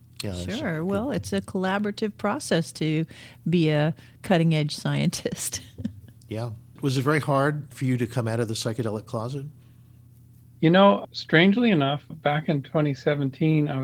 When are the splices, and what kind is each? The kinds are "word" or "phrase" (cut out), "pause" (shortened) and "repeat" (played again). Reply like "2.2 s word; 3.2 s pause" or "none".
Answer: none